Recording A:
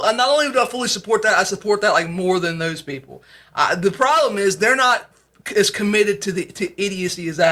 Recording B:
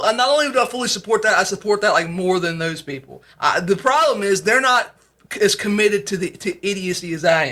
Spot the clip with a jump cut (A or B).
B